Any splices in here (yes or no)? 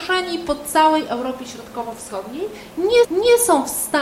yes